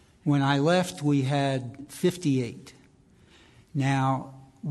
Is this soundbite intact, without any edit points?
yes; 0 cuts

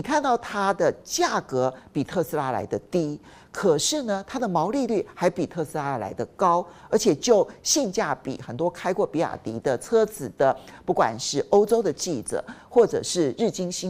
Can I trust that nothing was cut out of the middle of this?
yes; 0 cuts

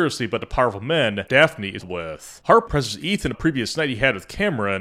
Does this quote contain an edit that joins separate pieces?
yes; 4 cuts; at 1.3 s, 1.8 s, 2.7 s, 3.3 s

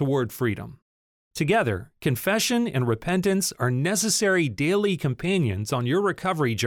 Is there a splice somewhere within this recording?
no; 0 cuts

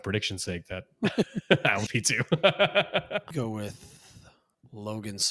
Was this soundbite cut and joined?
yes; 2 cuts; at 1.9 s, 3.3 s

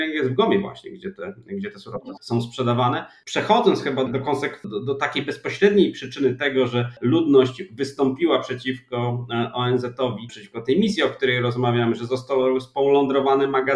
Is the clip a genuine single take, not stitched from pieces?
no; 3 cuts; at 2.2 s, 4.1 s, 10.3 s

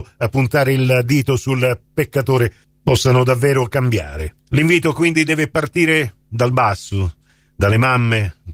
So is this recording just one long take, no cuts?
yes; 0 cuts

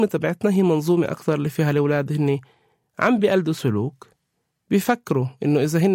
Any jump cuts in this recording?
no; 0 cuts

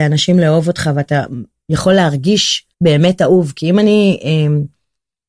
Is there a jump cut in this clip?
yes; 1 cut; at 2.7 s

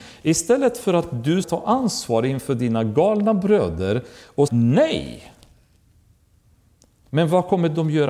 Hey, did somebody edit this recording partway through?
yes; 2 cuts; at 1.4 s, 4.5 s

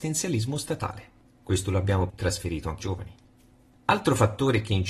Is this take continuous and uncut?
no; 2 cuts; at 2.1 s, 2.8 s

